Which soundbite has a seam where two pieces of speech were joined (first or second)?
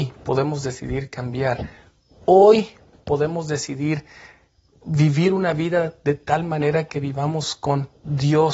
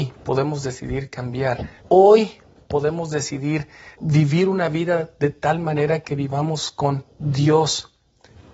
second